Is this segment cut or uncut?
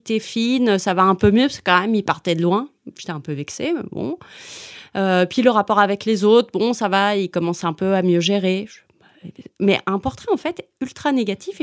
uncut